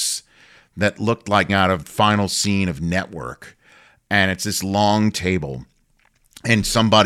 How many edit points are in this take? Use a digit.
2